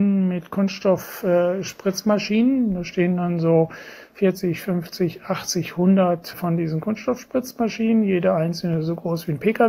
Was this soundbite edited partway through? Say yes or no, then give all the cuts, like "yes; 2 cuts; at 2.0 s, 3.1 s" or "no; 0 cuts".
yes; 1 cut; at 6.3 s